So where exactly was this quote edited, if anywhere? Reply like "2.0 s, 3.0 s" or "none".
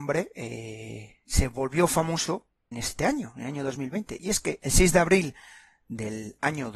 2.7 s, 4.6 s